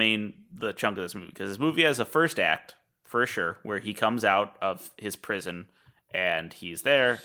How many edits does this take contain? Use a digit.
0